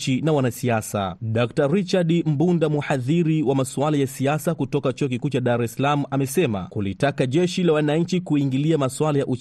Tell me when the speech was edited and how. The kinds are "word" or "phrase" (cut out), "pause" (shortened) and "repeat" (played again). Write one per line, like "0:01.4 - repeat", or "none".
none